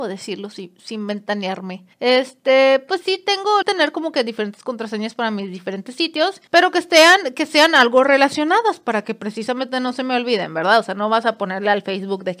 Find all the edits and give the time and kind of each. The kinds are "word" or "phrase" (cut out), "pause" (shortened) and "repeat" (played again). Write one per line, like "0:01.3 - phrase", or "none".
0:01.9 - pause
0:03.0 - word
0:03.6 - phrase
0:06.5 - pause